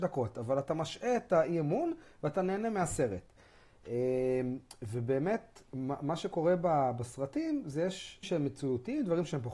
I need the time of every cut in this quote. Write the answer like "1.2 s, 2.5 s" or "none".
8.2 s